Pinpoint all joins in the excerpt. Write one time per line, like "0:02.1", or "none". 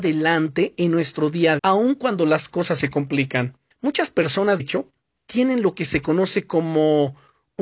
0:01.6
0:03.7
0:04.6